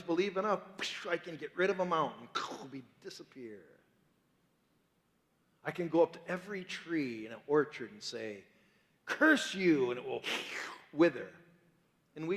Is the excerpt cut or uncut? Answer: uncut